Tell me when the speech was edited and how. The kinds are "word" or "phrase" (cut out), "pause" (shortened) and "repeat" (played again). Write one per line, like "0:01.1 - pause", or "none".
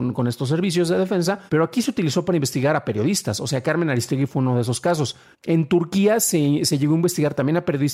0:01.5 - pause
0:05.3 - pause